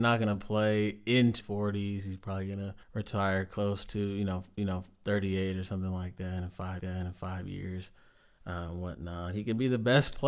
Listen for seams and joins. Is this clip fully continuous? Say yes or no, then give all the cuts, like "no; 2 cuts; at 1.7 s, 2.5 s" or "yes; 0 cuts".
no; 4 cuts; at 1.4 s, 2.8 s, 4.6 s, 6.8 s